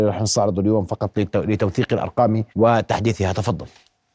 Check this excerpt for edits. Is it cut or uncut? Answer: cut